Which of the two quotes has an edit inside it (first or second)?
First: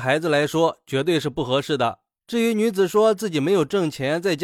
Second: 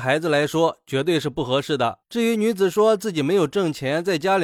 second